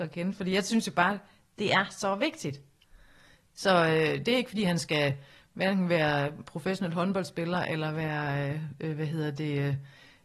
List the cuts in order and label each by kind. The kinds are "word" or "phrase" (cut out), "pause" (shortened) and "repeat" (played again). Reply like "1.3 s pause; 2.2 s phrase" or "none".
none

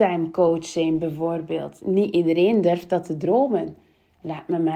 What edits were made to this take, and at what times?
none

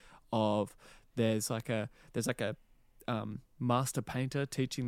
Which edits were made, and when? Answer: none

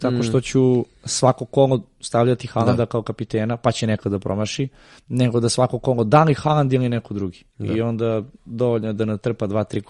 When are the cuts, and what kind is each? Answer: none

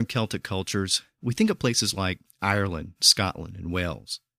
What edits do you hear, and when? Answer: none

